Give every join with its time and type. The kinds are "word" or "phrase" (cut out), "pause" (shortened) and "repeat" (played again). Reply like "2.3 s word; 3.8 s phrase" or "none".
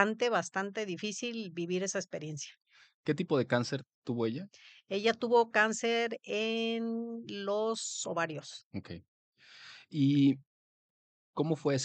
none